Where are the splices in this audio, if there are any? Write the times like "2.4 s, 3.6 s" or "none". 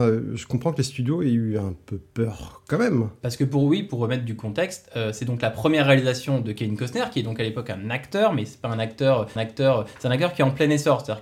9.4 s